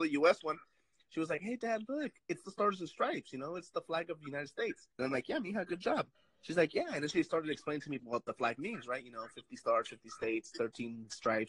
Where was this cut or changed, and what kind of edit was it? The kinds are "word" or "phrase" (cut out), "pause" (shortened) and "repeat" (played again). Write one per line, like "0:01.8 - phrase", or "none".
0:04.9 - pause
0:06.1 - pause
0:08.0 - word